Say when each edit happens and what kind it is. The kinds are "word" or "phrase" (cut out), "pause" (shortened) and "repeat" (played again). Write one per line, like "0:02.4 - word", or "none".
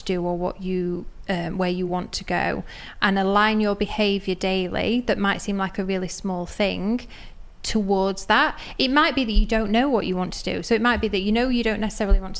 none

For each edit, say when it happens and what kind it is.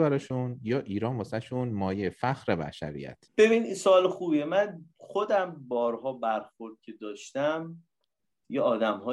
0:03.3 - pause

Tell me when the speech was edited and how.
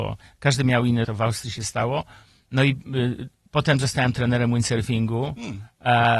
0:01.0 - word

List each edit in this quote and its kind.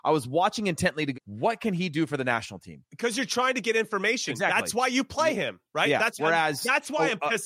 0:01.1 - word
0:06.2 - word

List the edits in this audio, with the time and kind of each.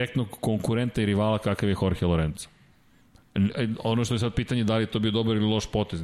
none

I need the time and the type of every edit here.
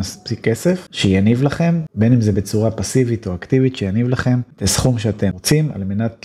none

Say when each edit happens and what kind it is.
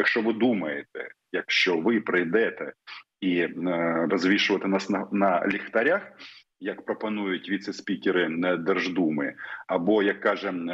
0:01.5 - word
0:04.1 - word

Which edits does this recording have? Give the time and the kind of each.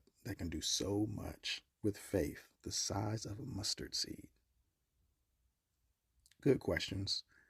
0:01.7 - pause
0:02.5 - pause

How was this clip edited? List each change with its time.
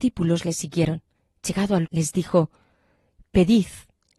0:01.1 - pause
0:01.8 - word

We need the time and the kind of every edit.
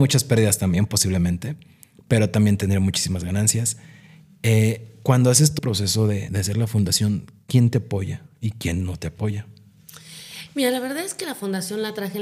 0:05.6 - word
0:06.3 - word

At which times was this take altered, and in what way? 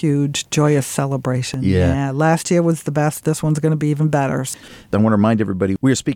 none

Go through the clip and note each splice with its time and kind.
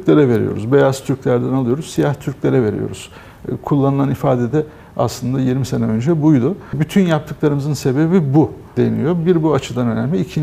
none

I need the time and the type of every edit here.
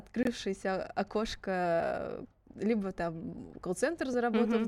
none

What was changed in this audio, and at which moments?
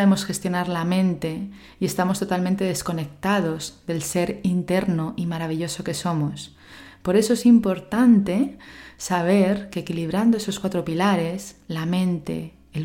none

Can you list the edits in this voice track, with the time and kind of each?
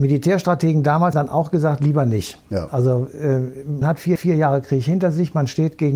0:01.1 - word
0:03.8 - word
0:04.2 - repeat

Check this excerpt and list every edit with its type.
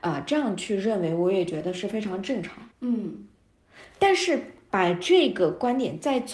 0:02.7 - pause

